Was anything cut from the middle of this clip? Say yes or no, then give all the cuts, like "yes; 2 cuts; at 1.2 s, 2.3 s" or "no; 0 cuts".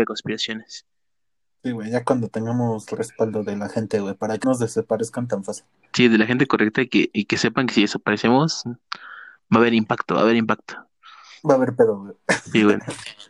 yes; 1 cut; at 4.4 s